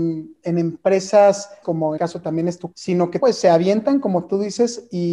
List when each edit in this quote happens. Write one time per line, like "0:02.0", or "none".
0:01.6
0:02.0
0:02.7
0:03.2